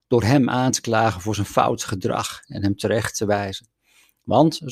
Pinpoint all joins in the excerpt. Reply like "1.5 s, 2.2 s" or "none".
none